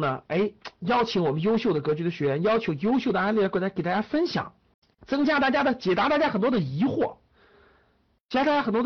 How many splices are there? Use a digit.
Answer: 1